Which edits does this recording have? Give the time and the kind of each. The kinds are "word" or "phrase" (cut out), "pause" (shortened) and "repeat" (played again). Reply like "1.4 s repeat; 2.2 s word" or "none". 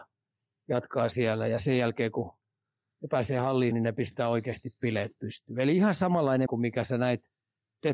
3.7 s word; 6.5 s word